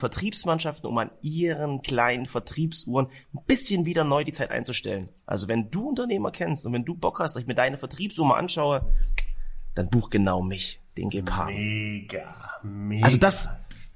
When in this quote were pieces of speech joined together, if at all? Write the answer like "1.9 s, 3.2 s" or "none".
5.2 s, 10.9 s